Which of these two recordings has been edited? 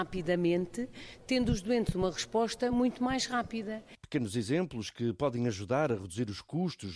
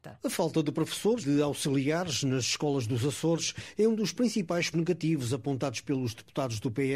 second; 2 cuts; at 1.2 s, 4.7 s

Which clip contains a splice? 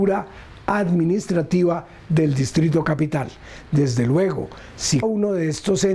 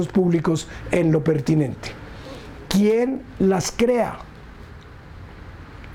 first; 1 cut; at 5.0 s

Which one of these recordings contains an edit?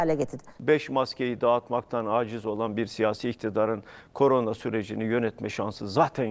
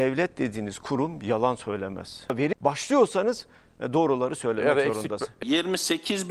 second; 1 cut; at 2.5 s

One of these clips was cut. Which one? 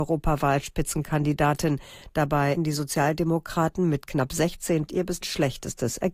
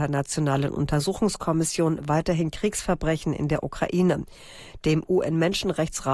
first; 3 cuts; at 2.6 s, 4.9 s, 5.2 s

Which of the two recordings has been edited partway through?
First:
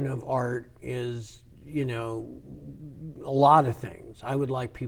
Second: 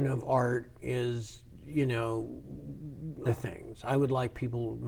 second; 1 cut; at 3.3 s

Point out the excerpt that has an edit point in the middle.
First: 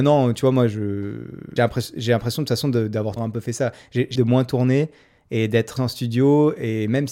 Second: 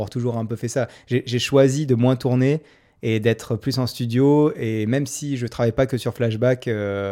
first; 4 cuts; at 1.6 s, 3.2 s, 4.2 s, 5.8 s

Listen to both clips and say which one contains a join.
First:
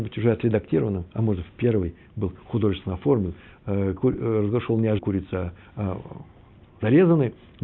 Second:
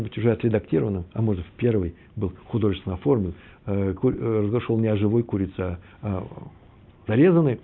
first; 1 cut; at 5.0 s

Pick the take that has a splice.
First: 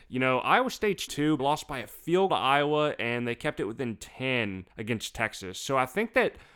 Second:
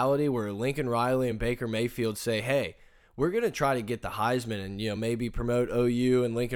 first; 4 cuts; at 1.1 s, 1.4 s, 2.3 s, 4.7 s

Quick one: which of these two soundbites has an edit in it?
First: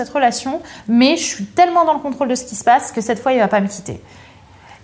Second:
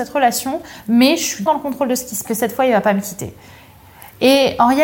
second; 2 cuts; at 1.5 s, 2.2 s

